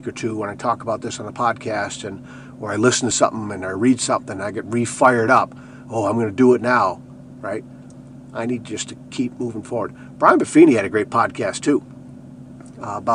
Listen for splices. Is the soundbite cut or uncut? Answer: uncut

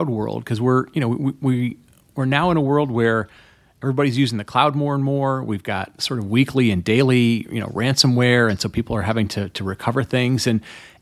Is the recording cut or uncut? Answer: uncut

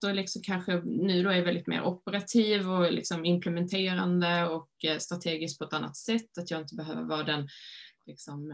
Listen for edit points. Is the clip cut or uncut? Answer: uncut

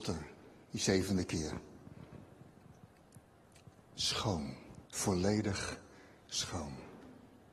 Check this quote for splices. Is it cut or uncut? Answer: cut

